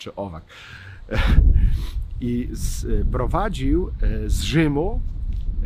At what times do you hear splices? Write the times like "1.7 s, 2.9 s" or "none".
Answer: none